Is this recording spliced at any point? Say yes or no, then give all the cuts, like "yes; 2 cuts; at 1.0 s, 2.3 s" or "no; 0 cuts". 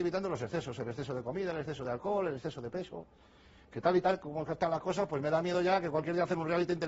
no; 0 cuts